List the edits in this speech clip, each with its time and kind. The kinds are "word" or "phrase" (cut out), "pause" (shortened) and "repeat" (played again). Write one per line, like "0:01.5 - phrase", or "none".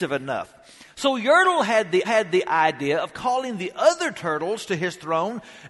0:02.0 - repeat